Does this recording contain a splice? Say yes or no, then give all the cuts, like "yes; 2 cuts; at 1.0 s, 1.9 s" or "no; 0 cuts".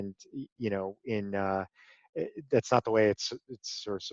no; 0 cuts